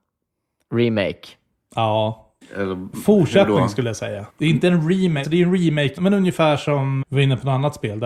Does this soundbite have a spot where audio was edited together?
yes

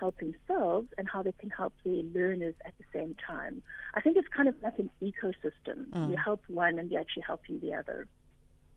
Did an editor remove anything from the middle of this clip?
no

